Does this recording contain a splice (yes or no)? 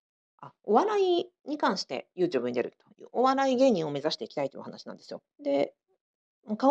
yes